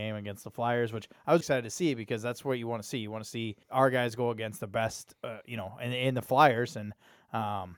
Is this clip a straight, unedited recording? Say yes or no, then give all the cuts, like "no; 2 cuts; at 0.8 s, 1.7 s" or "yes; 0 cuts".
no; 3 cuts; at 1.4 s, 3.6 s, 5.2 s